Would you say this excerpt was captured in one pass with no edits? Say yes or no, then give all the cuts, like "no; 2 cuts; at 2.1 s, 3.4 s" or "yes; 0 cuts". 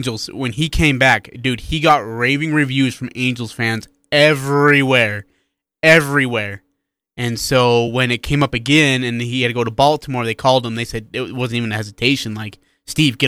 yes; 0 cuts